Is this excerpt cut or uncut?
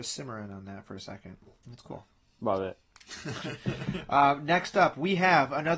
uncut